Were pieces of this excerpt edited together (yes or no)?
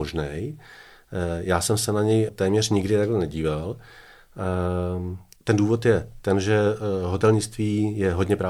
yes